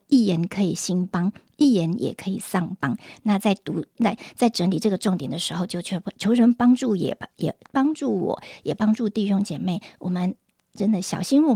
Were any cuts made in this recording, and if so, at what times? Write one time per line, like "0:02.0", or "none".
none